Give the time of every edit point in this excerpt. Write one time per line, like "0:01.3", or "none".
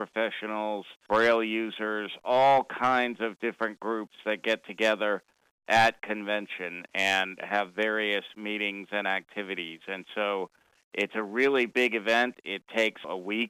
none